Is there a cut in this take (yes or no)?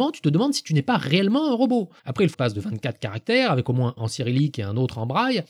yes